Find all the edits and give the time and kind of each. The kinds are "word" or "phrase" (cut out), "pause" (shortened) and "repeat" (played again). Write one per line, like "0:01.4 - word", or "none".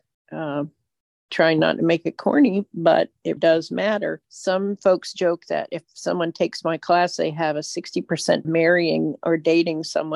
0:03.4 - word
0:04.2 - pause
0:08.4 - phrase